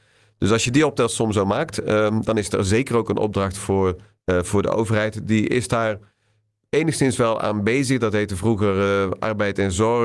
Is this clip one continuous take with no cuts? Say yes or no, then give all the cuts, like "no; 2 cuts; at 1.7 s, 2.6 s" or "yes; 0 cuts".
no; 1 cut; at 4.1 s